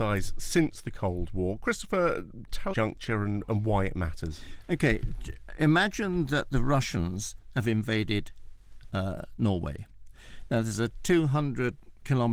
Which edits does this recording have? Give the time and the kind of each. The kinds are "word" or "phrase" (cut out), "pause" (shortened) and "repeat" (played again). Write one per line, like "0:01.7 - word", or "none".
0:02.7 - phrase

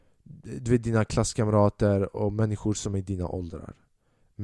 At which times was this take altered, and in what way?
none

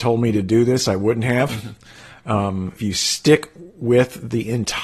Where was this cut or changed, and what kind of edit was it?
0:02.8 - word

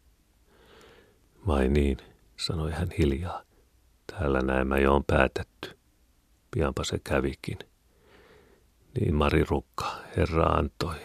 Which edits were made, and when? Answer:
0:09.1 - word

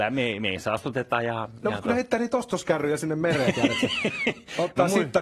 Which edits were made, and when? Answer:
none

